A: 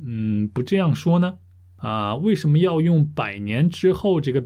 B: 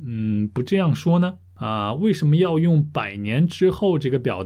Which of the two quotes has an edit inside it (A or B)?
B